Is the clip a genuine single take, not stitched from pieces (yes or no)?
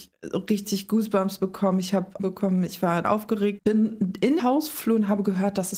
no